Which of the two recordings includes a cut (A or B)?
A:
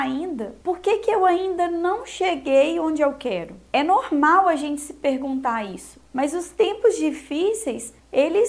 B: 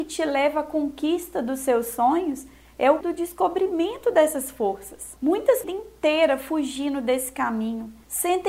B